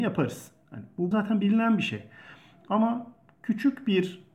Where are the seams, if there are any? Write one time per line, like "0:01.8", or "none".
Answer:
0:01.1